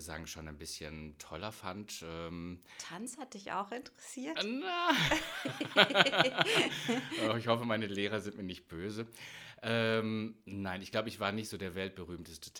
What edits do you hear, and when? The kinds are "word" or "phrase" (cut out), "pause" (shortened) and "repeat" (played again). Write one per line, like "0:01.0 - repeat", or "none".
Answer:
none